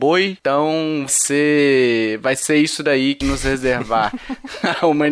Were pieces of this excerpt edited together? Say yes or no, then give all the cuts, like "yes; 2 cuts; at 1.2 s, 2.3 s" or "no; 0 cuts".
yes; 2 cuts; at 1.1 s, 3.2 s